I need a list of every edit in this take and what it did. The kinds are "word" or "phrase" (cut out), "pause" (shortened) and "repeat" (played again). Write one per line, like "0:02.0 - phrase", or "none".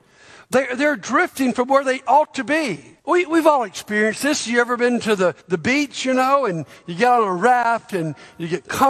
0:03.0 - pause
0:05.4 - pause